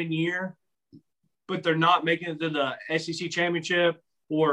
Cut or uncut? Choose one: uncut